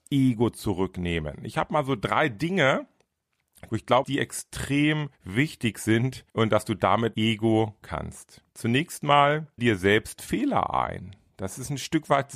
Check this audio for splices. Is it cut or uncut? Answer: cut